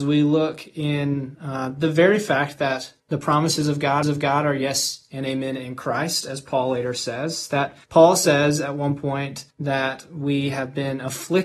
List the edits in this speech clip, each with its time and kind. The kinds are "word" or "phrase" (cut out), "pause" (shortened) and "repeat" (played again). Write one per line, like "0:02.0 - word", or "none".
0:03.0 - pause
0:04.0 - repeat
0:07.8 - pause
0:09.5 - pause